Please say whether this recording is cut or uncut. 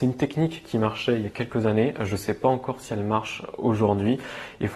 uncut